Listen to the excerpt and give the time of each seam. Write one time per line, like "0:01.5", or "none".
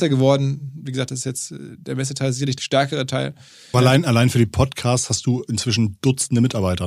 0:02.6
0:03.7